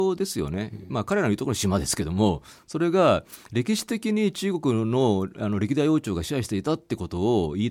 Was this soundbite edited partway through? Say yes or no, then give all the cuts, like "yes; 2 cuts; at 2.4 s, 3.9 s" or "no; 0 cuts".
no; 0 cuts